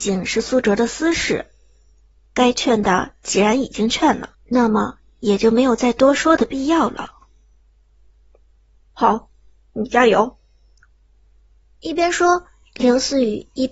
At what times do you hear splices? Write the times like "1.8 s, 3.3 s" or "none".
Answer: 4.3 s

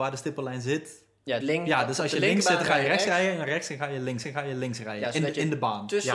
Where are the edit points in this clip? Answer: 1.4 s, 4.2 s

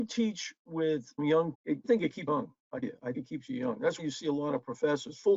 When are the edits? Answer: 1.2 s, 1.5 s, 1.8 s, 2.3 s, 2.8 s, 3.1 s, 4.0 s

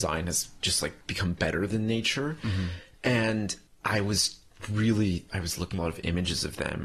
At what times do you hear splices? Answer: 1.0 s, 5.8 s

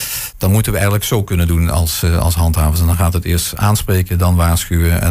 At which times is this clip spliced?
none

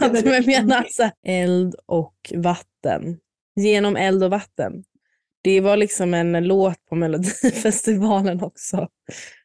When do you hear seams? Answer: 1.2 s, 3.4 s

